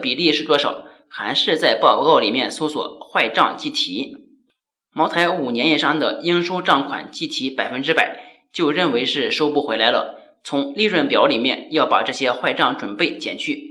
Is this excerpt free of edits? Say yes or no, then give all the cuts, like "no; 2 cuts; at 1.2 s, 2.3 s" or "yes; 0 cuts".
yes; 0 cuts